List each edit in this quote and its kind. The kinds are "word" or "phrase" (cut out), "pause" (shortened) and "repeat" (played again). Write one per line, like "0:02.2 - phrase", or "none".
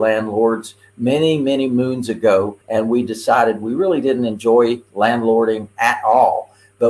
0:02.6 - pause